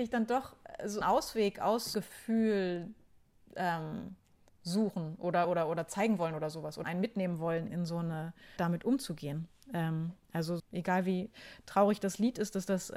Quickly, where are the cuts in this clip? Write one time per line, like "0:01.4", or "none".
0:01.0
0:01.9
0:04.5
0:05.4
0:06.8
0:07.7
0:08.6
0:10.6